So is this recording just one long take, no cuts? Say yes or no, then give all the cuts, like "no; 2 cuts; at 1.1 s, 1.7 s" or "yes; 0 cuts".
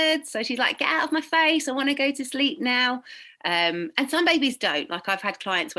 yes; 0 cuts